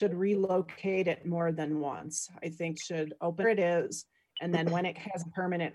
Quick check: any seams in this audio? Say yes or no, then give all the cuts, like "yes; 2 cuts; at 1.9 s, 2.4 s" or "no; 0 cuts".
yes; 2 cuts; at 2.7 s, 3.4 s